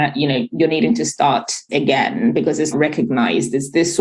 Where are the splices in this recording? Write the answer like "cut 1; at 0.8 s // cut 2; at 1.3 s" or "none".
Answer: cut 1; at 1.7 s // cut 2; at 2.7 s

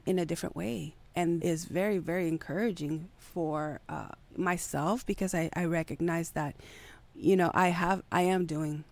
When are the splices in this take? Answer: cut 1; at 1.4 s // cut 2; at 4.2 s

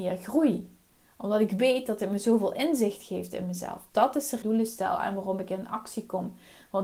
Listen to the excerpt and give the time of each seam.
cut 1; at 4.4 s

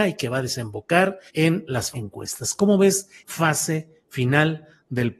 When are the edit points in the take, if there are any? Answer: cut 1; at 1.3 s // cut 2; at 1.9 s // cut 3; at 3.2 s

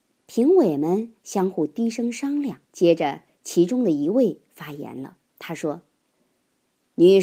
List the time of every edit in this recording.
cut 1; at 2.6 s // cut 2; at 5.3 s

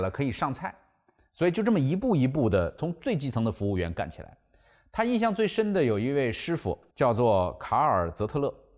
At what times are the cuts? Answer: cut 1; at 6.9 s

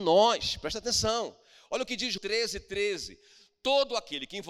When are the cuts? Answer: cut 1; at 2.2 s

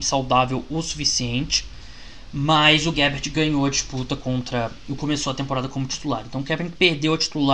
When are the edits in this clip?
cut 1; at 2.9 s // cut 2; at 5.0 s

